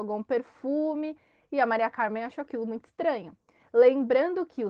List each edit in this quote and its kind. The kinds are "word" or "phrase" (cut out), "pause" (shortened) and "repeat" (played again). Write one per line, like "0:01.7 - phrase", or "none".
none